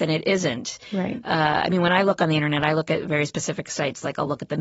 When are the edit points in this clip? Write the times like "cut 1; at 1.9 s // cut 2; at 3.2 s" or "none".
none